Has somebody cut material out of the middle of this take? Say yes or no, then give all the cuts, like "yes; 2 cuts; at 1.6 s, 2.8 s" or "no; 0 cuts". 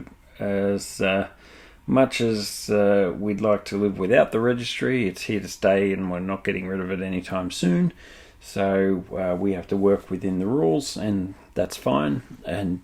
no; 0 cuts